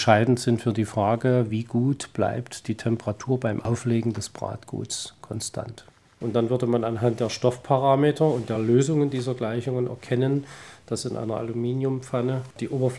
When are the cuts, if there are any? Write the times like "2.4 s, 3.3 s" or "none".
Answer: none